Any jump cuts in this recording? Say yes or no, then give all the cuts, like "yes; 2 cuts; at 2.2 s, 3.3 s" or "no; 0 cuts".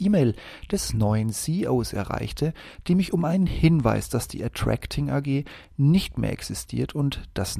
no; 0 cuts